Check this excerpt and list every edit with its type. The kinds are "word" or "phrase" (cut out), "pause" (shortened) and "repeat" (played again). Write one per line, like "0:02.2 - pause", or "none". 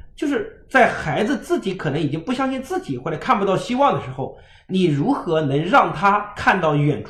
none

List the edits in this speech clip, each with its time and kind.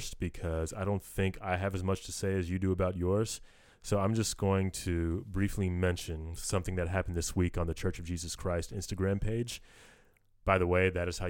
none

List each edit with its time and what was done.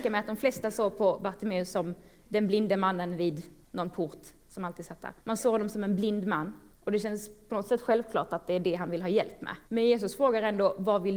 0:03.6 - pause
0:05.2 - pause
0:06.7 - pause
0:09.7 - pause

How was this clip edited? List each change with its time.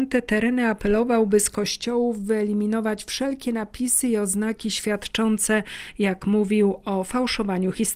none

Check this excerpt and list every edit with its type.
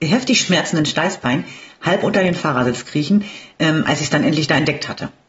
none

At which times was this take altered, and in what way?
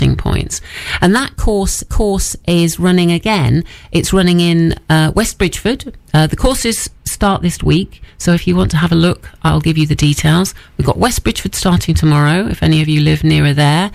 0:01.9 - repeat

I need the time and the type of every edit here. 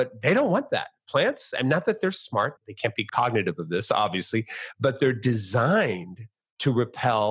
0:02.6 - word

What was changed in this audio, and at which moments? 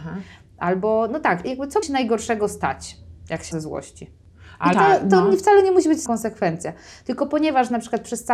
0:01.4 - word
0:01.8 - word
0:03.5 - word
0:04.7 - word
0:06.1 - word

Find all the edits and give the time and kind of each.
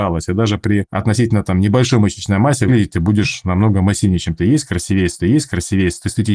0:05.2 - repeat

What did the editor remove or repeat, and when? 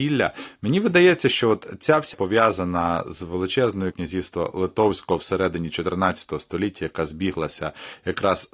0:02.1 - word
0:03.9 - phrase

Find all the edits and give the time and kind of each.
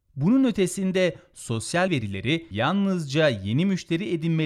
0:01.9 - word
0:02.5 - word

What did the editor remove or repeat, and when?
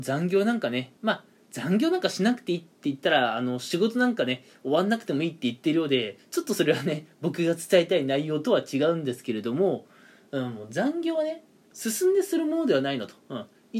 0:01.0 - pause
0:11.7 - phrase

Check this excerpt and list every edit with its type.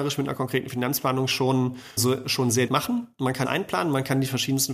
0:02.0 - word
0:02.7 - word
0:03.4 - word

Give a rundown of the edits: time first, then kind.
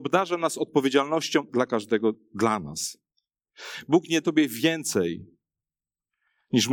0:01.5 - word
0:04.2 - word

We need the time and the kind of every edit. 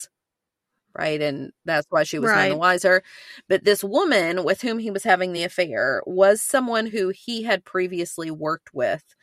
none

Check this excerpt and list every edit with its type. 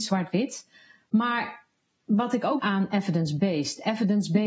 0:02.6 - phrase

